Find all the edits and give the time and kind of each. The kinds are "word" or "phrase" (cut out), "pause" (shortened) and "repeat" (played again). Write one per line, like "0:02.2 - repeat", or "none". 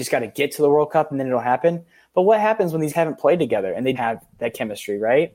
0:02.9 - word
0:03.9 - word
0:04.4 - word

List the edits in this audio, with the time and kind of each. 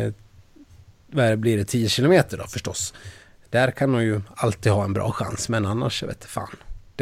none

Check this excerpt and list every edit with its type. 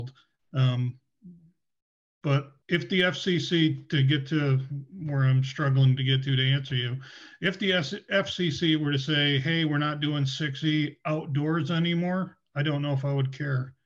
0:02.6 - pause

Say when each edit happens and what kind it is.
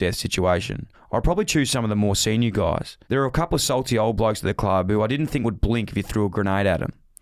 0:00.9 - pause
0:03.0 - pause

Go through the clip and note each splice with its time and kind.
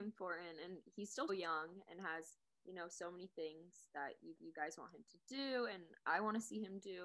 0:01.3 - word
0:02.4 - pause
0:04.4 - repeat

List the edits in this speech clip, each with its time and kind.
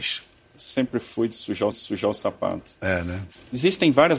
0:01.7 - repeat

